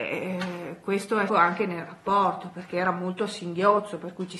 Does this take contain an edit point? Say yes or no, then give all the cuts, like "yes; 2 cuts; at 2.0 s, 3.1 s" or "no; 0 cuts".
yes; 1 cut; at 1.3 s